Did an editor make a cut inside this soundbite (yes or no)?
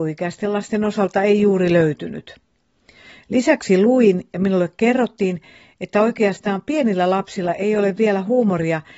no